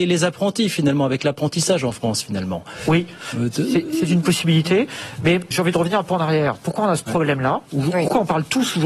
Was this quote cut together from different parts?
yes; 1 cut; at 5.5 s

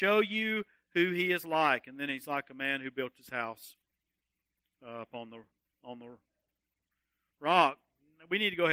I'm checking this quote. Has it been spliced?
no; 0 cuts

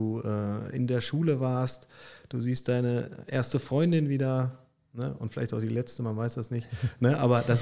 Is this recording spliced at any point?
no; 0 cuts

